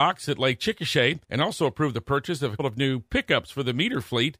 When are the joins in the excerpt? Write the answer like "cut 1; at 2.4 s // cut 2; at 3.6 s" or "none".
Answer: cut 1; at 1.2 s // cut 2; at 2.6 s